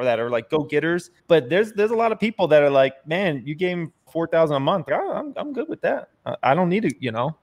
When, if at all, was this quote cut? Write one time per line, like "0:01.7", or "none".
0:01.2
0:04.1
0:04.9